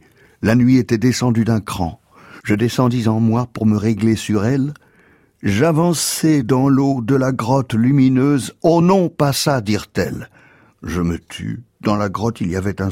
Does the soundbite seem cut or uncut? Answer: uncut